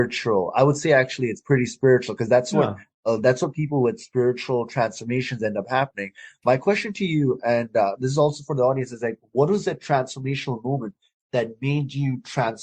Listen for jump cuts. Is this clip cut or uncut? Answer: uncut